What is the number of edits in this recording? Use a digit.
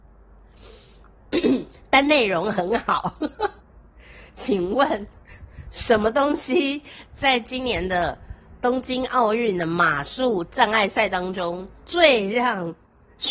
2